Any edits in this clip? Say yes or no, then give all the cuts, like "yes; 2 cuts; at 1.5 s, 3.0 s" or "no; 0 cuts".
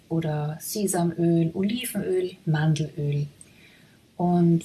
no; 0 cuts